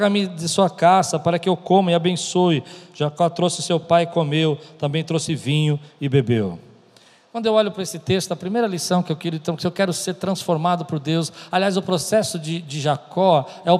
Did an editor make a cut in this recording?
no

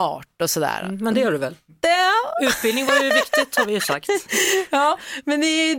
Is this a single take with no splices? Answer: yes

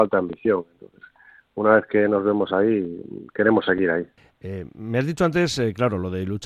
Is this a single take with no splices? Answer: yes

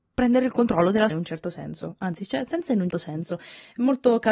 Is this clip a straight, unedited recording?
no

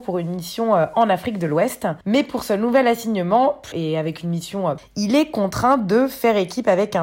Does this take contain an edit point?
yes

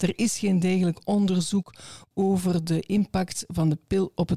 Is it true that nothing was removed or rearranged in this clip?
yes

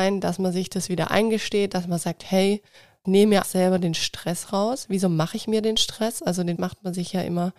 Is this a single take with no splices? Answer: no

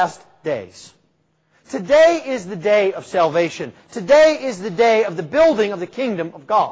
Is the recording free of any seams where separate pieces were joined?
yes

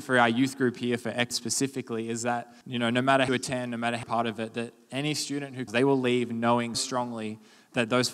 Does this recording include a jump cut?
yes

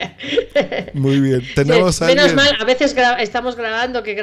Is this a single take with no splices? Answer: yes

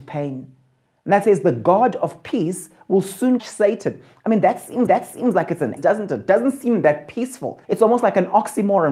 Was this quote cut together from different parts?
yes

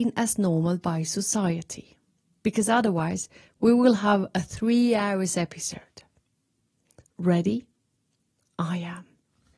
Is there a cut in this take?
no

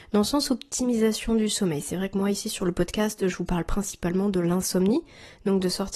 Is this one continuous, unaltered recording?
yes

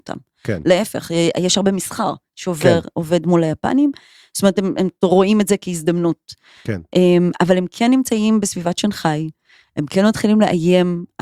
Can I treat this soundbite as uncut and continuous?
yes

